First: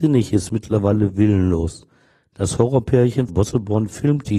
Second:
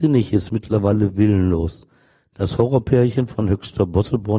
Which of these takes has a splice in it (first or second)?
first